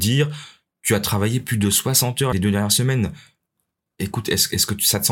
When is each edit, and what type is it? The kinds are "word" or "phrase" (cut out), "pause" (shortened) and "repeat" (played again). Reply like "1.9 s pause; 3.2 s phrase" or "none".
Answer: 2.3 s word